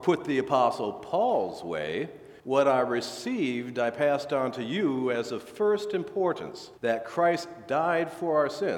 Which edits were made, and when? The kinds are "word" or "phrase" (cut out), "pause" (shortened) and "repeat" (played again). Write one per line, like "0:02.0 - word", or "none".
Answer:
0:02.4 - pause
0:06.8 - pause